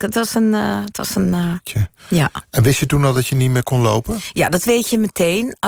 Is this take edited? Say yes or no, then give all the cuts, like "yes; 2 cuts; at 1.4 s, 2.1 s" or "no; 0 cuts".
no; 0 cuts